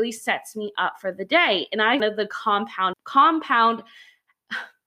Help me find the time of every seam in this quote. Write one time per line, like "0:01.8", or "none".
0:02.0
0:02.9